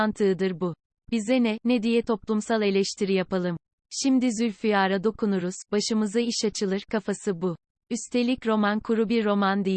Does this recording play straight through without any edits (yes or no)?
yes